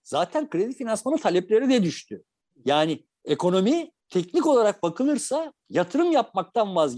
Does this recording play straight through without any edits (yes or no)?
no